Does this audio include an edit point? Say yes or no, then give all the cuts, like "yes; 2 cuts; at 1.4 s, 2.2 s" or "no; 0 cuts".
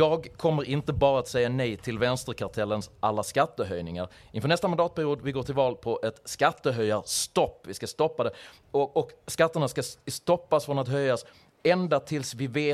no; 0 cuts